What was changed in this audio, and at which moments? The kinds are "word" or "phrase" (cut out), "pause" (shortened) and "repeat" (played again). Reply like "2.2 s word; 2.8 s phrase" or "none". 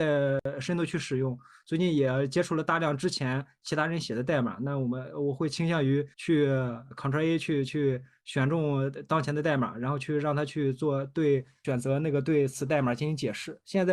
6.1 s pause